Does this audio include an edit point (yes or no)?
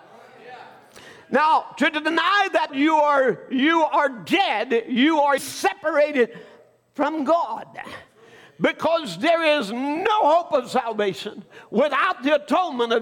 yes